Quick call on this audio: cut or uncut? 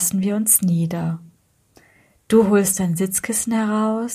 uncut